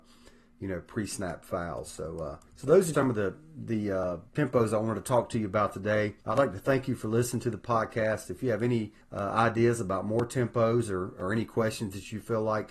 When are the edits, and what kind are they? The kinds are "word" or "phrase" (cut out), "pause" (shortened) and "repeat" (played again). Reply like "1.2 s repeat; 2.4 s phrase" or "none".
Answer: 2.5 s pause; 2.9 s word; 4.3 s pause; 6.2 s pause; 9.0 s pause